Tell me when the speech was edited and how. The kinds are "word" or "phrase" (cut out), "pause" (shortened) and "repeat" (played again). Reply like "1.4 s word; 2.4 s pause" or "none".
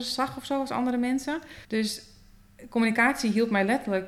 1.6 s pause